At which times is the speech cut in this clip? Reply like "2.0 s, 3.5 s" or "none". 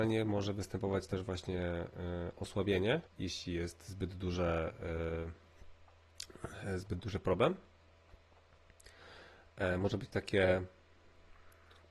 3.1 s